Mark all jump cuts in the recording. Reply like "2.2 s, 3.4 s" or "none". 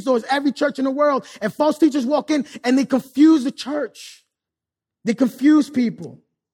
4.5 s